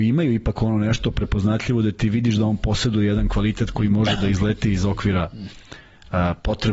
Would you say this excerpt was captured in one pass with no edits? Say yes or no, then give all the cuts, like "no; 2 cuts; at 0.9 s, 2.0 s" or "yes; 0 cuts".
yes; 0 cuts